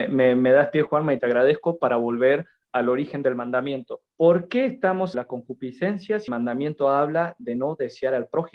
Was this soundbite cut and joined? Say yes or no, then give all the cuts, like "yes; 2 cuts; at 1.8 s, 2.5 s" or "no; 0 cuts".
yes; 3 cuts; at 4.1 s, 5.1 s, 6.3 s